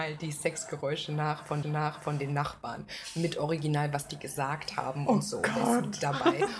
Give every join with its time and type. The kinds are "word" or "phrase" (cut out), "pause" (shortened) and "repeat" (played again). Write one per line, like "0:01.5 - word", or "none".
0:01.6 - repeat